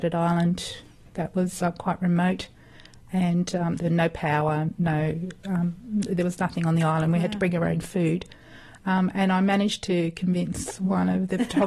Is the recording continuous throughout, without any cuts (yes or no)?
yes